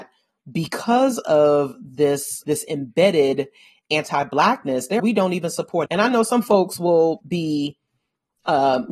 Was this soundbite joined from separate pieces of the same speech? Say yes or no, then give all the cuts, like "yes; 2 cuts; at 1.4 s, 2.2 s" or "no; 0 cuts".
yes; 3 cuts; at 2.4 s, 5.0 s, 5.9 s